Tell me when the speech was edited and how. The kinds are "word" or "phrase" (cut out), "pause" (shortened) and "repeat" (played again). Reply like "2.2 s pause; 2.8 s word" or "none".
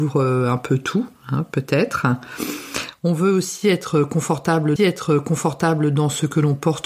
4.8 s repeat